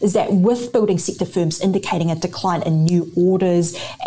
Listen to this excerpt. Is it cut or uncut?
uncut